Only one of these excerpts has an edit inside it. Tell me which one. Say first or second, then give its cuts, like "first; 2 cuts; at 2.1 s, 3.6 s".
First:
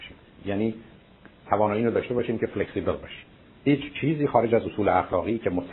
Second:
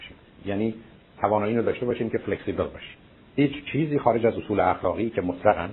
second; 1 cut; at 1.1 s